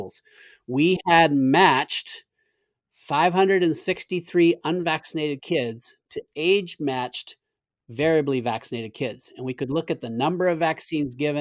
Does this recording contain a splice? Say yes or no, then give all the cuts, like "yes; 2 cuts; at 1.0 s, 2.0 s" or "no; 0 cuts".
no; 0 cuts